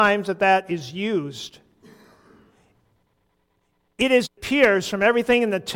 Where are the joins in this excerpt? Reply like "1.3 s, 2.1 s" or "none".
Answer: 4.2 s